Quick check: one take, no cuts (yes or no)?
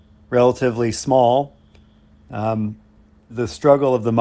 no